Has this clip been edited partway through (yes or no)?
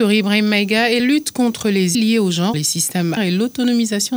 yes